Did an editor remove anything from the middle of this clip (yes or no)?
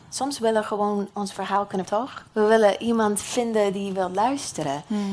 yes